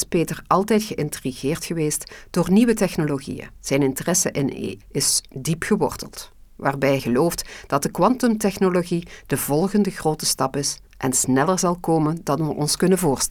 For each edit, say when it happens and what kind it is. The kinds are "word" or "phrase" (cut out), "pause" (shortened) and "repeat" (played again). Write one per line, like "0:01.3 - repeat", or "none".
0:03.6 - pause
0:04.8 - word
0:07.0 - word
0:10.9 - pause